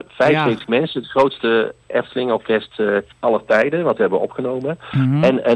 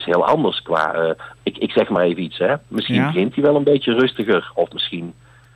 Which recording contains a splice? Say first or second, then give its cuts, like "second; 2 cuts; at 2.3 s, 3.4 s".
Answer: first; 2 cuts; at 3.1 s, 4.0 s